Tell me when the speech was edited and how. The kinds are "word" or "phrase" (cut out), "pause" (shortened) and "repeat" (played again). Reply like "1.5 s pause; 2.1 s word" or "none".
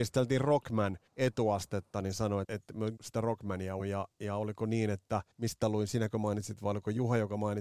1.1 s pause; 2.4 s word; 3.0 s word; 3.8 s word; 5.3 s pause